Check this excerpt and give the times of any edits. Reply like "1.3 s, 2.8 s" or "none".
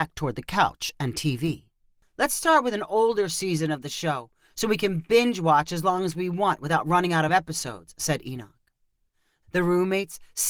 none